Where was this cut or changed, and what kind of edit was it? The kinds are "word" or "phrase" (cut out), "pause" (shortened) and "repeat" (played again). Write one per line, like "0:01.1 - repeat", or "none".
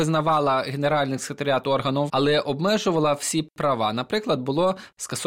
0:02.1 - word

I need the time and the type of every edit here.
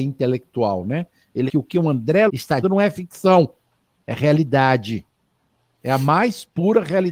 0:01.5 - word
0:02.3 - word
0:02.6 - word

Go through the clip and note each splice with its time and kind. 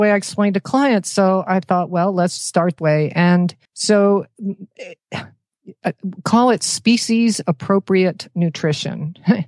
0:02.4 - word
0:02.8 - phrase
0:03.6 - pause

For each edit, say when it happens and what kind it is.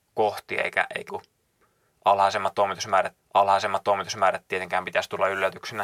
0:01.1 - word
0:03.2 - repeat

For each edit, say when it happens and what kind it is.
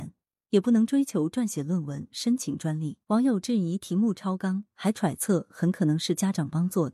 0:03.0 - pause

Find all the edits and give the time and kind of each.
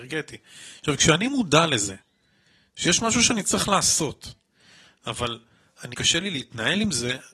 0:05.9 - word

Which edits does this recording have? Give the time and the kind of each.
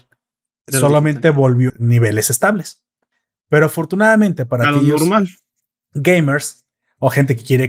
0:01.7 - phrase

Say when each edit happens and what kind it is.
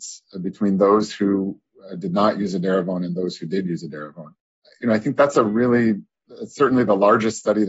none

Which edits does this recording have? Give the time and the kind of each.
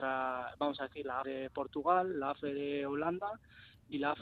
0:01.2 - word

